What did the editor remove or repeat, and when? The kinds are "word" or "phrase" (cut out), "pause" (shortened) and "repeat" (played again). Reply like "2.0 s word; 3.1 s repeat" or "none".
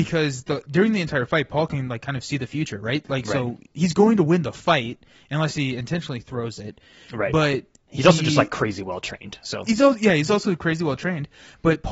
none